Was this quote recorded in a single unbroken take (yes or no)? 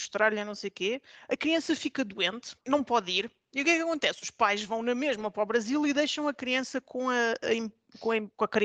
no